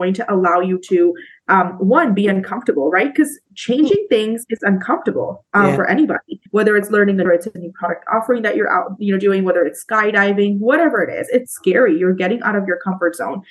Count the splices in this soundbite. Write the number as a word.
three